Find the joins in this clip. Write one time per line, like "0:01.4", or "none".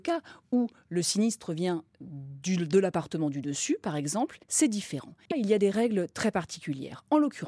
0:04.4
0:05.3